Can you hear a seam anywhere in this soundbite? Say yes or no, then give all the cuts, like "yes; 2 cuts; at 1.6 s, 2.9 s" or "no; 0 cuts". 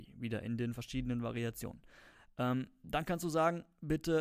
no; 0 cuts